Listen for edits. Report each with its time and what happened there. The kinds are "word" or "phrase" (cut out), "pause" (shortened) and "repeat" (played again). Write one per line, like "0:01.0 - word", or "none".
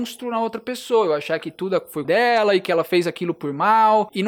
0:02.0 - word

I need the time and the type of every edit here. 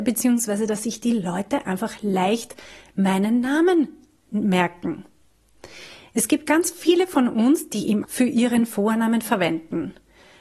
0:08.0 - phrase

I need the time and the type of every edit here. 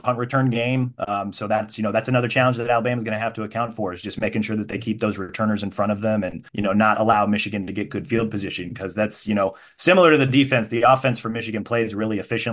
0:06.5 - pause

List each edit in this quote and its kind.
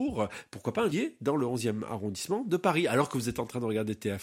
0:00.9 - phrase

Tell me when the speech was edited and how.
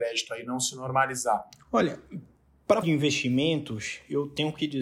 0:02.8 - word

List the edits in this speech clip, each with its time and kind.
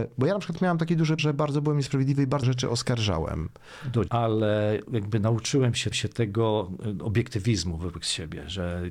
0:01.2 - word
0:02.4 - phrase
0:04.1 - word
0:05.9 - repeat

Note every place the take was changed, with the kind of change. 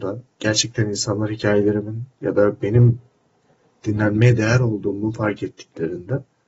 none

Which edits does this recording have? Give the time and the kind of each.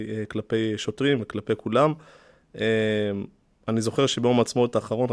none

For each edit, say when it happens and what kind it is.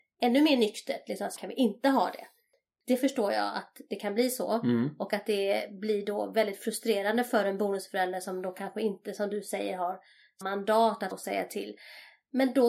0:01.4 - word
0:10.4 - word
0:11.1 - word

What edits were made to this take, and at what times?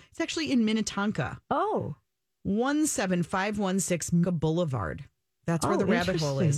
0:01.4 - pause
0:04.2 - word

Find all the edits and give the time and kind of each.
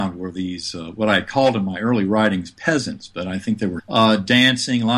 0:03.8 - word

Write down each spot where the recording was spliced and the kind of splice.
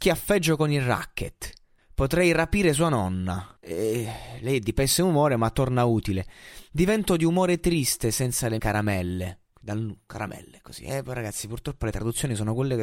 0:01.8 - pause
0:03.6 - pause
0:08.6 - word

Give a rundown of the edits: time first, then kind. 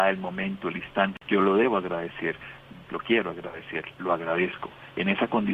none

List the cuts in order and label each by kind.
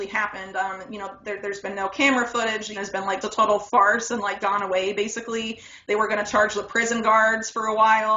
0:02.7 - phrase
0:03.2 - word
0:04.4 - word

